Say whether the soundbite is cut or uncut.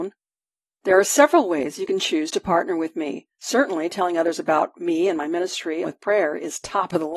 cut